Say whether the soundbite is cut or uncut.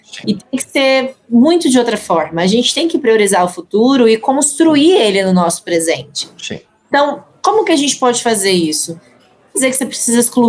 cut